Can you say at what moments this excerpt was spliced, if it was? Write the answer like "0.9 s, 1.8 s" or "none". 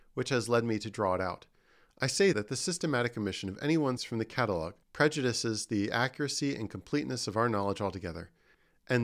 2.3 s, 4.0 s, 4.8 s